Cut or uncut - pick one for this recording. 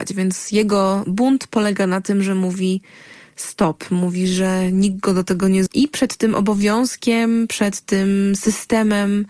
cut